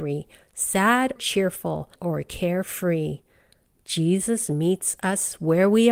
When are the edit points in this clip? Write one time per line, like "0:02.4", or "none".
0:01.2
0:01.9